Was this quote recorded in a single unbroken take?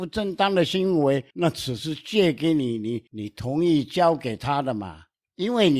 no; 2 cuts; at 1.3 s, 3.1 s

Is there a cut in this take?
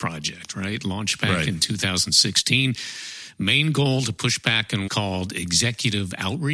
yes; 1 cut; at 4.9 s

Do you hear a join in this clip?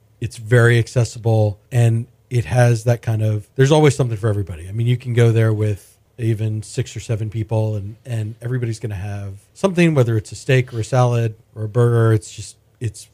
yes; 5 cuts; at 1.7 s, 3.5 s, 6.1 s, 9.5 s, 11.4 s

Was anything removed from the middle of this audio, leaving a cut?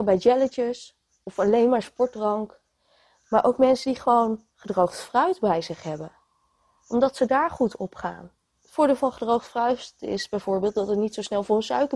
no; 0 cuts

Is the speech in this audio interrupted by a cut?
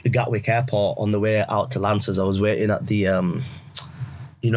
no; 0 cuts

